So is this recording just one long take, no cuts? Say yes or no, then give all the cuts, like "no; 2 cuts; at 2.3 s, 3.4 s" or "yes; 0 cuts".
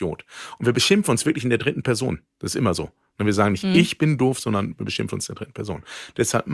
yes; 0 cuts